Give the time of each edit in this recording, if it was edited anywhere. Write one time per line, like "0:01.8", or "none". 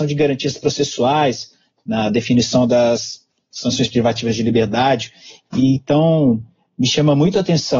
none

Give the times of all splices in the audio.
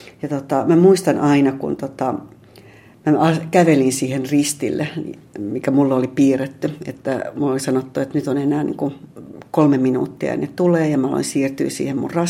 none

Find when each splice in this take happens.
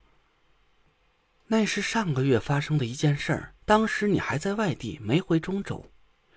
0:03.6

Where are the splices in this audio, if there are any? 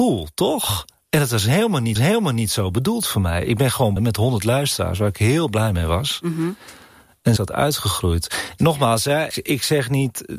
0:02.0
0:04.0
0:07.4
0:09.3

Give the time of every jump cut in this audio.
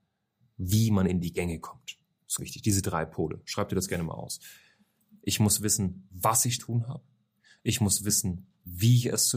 0:02.4
0:06.6

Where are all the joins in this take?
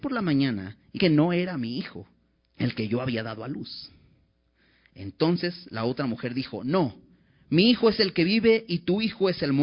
0:00.9
0:02.3

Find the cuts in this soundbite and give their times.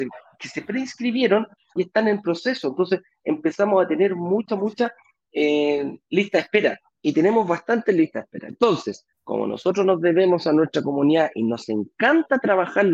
0:01.8
0:04.5
0:09.1

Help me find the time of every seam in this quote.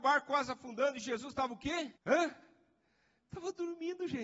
0:02.0

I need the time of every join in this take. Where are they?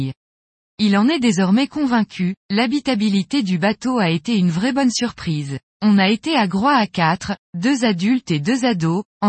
0:02.4
0:05.6

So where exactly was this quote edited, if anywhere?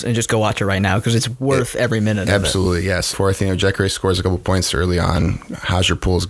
0:03.1

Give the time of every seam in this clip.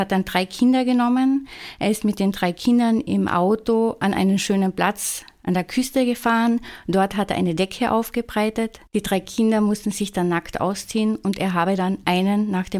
0:08.9

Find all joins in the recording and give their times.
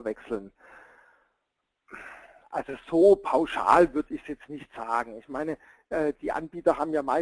none

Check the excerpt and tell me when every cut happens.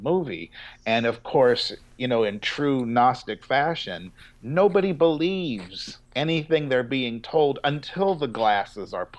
0:06.0

